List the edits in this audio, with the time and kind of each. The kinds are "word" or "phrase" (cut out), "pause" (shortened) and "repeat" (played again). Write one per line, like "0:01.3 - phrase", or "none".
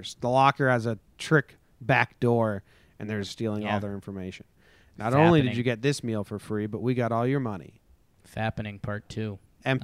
0:03.2 - phrase